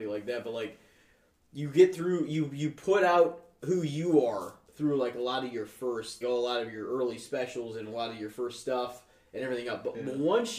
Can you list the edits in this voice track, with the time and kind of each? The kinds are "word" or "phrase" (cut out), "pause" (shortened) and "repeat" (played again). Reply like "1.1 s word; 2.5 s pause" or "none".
4.7 s pause; 6.2 s word